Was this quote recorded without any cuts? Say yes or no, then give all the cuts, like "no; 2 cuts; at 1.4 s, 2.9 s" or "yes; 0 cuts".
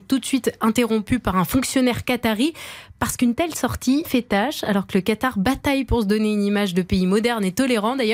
no; 1 cut; at 4.0 s